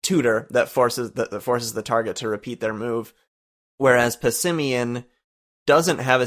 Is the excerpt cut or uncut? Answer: uncut